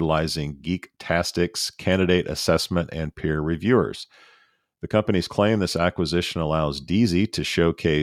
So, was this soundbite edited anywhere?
no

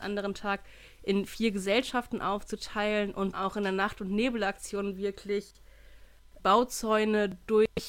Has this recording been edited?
yes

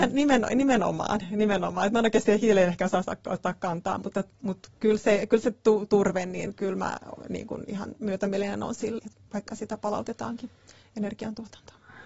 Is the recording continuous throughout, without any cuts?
no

